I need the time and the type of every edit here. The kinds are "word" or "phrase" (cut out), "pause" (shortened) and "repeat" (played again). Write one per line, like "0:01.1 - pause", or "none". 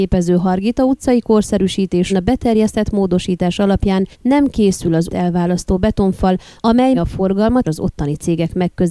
0:02.1 - word
0:04.1 - pause
0:05.1 - word
0:06.9 - word
0:07.6 - word